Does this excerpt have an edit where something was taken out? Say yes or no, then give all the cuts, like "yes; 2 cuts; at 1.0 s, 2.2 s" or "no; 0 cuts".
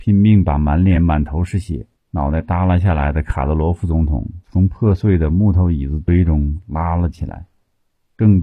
no; 0 cuts